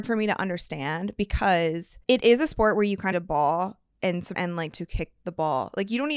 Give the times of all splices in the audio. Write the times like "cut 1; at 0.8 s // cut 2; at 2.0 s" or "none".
cut 1; at 2.0 s // cut 2; at 3.1 s // cut 3; at 4.3 s // cut 4; at 4.7 s